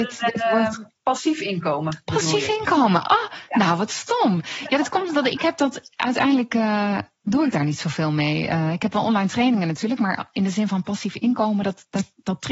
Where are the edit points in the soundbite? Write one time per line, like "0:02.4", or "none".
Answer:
0:01.0

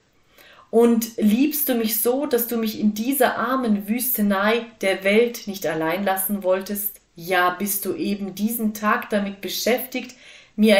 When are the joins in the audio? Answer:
0:07.1

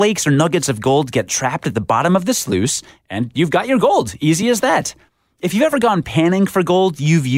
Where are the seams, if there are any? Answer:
none

